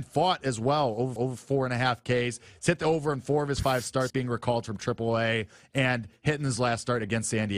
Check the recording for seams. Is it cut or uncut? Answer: cut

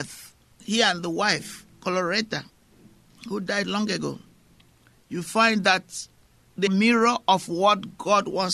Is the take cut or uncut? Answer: cut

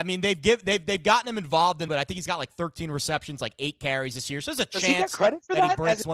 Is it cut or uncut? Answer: cut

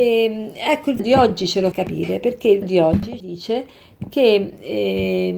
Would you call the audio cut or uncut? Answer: cut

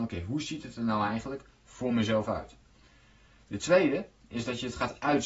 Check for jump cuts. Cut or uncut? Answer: uncut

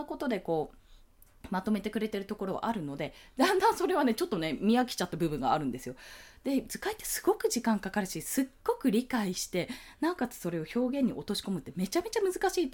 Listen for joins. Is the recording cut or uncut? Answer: uncut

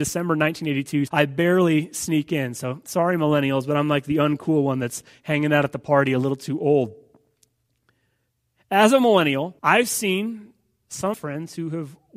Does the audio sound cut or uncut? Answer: cut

